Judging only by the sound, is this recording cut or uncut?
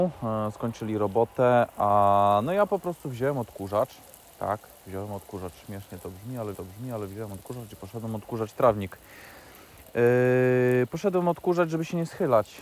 cut